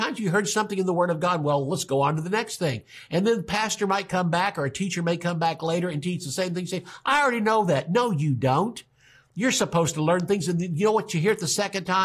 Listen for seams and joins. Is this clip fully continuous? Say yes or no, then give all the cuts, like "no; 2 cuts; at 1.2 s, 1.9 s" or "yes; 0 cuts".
yes; 0 cuts